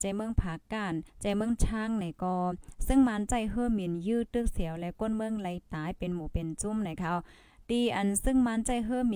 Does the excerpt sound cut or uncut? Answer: cut